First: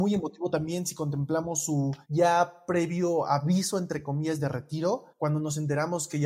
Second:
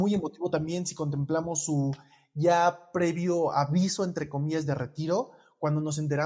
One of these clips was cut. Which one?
first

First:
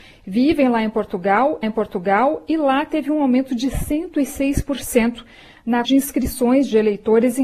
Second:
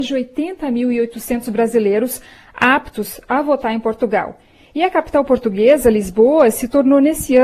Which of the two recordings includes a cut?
first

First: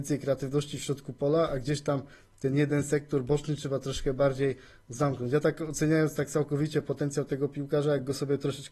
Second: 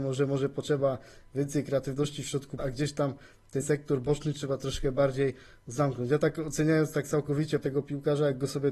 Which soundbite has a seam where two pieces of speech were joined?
second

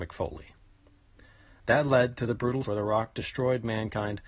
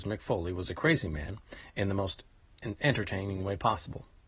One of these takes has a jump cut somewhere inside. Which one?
first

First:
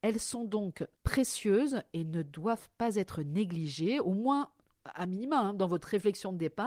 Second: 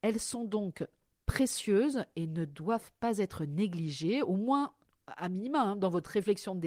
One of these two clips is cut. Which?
first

